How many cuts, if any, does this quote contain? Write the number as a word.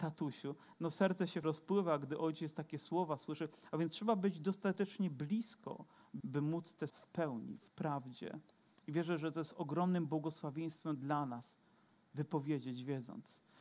three